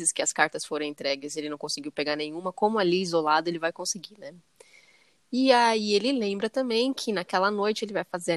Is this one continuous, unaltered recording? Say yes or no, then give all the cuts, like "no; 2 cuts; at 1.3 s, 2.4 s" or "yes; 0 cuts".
yes; 0 cuts